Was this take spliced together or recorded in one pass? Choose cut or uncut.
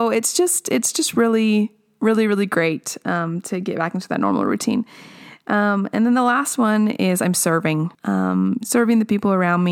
cut